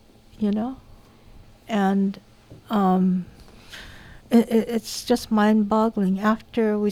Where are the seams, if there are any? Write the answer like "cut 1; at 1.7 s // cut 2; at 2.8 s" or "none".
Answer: cut 1; at 4.2 s